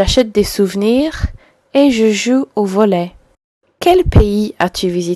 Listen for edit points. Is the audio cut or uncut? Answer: uncut